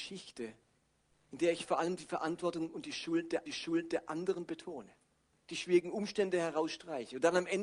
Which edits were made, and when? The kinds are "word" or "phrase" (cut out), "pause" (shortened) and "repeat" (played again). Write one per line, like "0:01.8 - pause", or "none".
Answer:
0:03.5 - repeat